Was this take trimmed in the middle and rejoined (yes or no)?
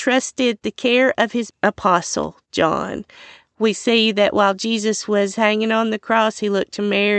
yes